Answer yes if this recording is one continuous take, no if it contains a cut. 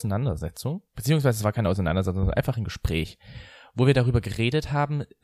yes